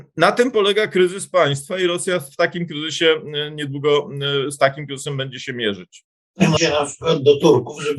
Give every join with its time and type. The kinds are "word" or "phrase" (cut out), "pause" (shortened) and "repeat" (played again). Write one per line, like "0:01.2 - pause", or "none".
0:06.6 - phrase

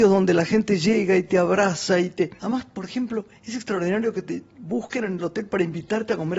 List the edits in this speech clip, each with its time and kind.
0:02.4 - pause
0:03.3 - pause

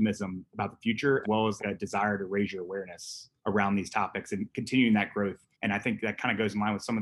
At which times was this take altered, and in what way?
0:01.2 - word
0:01.6 - word
0:03.4 - pause
0:05.5 - pause

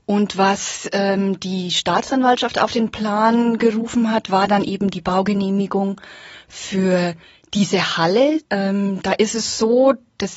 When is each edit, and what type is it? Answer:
0:07.2 - pause
0:08.4 - pause

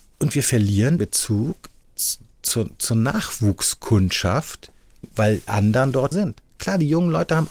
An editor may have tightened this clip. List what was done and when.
0:01.0 - word
0:01.8 - pause
0:05.5 - word
0:06.1 - word

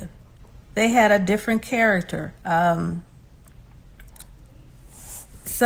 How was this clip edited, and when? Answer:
0:02.4 - pause

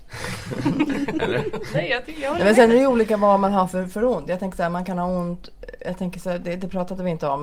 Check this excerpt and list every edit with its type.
none

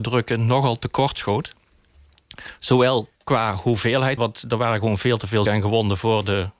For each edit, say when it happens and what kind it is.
0:03.2 - pause
0:04.2 - word
0:05.5 - word

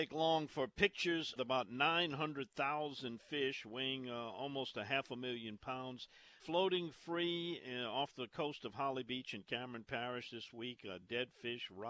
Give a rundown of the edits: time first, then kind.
0:01.4 - phrase
0:06.4 - word

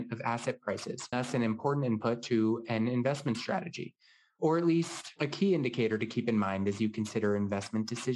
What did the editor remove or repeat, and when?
0:01.1 - word

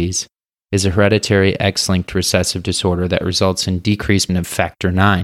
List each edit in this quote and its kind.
0:04.3 - word

